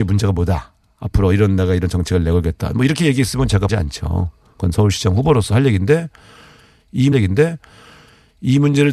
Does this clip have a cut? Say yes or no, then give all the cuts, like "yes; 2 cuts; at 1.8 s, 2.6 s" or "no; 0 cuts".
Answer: yes; 2 cuts; at 3.7 s, 7.1 s